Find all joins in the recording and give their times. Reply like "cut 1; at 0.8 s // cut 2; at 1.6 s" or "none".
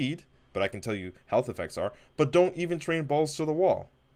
none